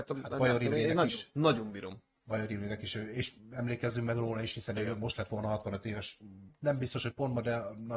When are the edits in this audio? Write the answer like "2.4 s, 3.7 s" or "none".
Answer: none